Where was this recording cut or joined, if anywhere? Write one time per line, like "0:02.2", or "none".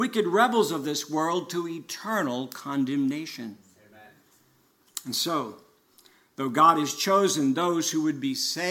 none